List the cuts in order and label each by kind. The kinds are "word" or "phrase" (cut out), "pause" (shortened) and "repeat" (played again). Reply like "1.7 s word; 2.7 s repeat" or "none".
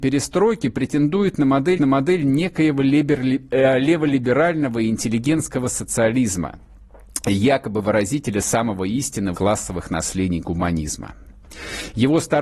1.8 s repeat; 9.3 s phrase